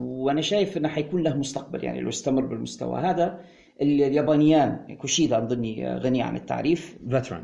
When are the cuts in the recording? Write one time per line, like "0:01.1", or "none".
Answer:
none